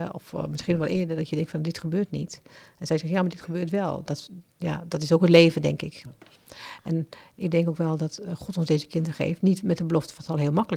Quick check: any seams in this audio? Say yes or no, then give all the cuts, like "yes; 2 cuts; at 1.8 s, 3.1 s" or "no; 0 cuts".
yes; 1 cut; at 4.5 s